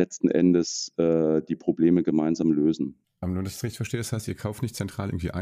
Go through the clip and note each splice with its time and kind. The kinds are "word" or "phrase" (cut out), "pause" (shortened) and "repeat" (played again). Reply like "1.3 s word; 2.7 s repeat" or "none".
none